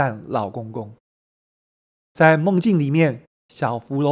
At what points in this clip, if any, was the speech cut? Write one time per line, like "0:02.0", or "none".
none